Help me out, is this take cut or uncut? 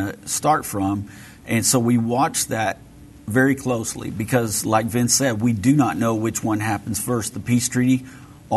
uncut